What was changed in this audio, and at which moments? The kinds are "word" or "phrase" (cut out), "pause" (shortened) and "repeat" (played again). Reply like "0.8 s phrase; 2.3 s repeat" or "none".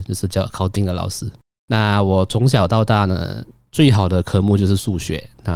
none